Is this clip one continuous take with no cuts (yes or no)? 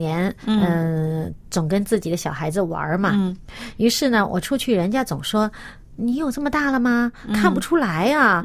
yes